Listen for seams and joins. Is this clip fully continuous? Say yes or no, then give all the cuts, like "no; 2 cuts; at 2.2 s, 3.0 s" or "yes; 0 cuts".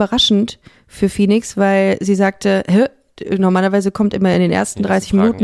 yes; 0 cuts